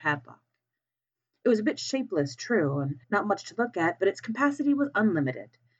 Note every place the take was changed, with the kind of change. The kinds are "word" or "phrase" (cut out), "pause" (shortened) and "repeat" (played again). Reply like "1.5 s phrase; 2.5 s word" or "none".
3.0 s pause